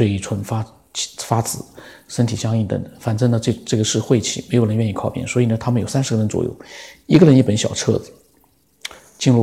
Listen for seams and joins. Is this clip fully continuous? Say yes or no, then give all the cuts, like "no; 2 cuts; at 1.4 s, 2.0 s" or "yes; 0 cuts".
yes; 0 cuts